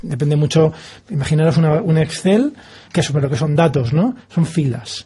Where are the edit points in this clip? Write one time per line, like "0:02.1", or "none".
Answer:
0:02.9

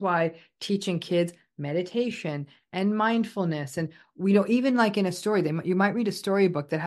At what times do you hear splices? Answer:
none

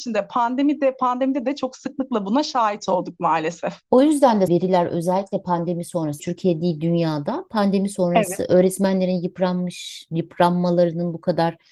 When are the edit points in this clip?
0:03.8
0:04.5
0:06.2

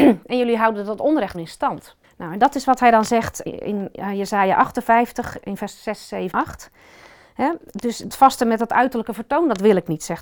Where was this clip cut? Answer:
0:01.3
0:02.0
0:03.4
0:06.3
0:08.1

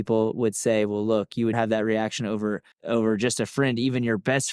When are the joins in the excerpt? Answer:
0:01.5
0:02.7

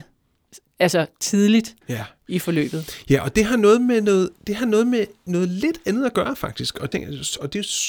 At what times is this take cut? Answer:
0:01.8
0:04.4
0:06.9

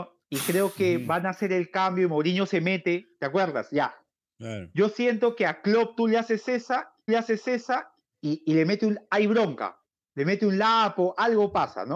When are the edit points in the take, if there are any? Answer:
0:07.1

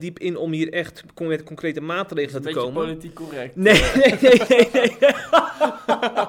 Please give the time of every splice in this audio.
none

